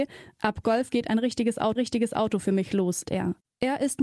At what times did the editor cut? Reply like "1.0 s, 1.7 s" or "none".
1.8 s, 3.0 s